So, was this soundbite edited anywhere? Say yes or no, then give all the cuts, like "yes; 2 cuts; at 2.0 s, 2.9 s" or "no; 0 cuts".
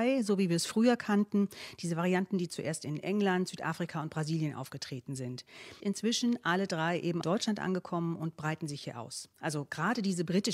yes; 2 cuts; at 5.8 s, 7.2 s